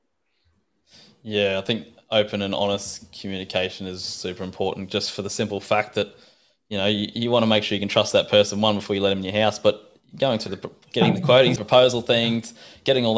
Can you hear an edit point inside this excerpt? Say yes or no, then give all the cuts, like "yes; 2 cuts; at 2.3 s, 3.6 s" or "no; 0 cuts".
yes; 1 cut; at 11.6 s